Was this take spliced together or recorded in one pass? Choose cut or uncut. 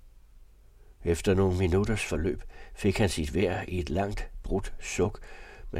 uncut